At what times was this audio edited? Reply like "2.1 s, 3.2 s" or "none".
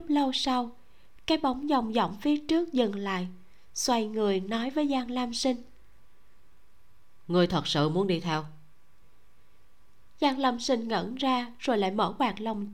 none

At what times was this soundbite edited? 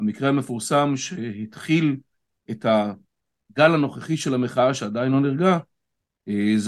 none

